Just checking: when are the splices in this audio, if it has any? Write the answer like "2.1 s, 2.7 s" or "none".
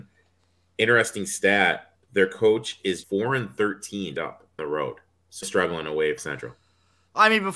2.0 s, 3.0 s, 4.2 s, 4.6 s, 5.4 s, 6.2 s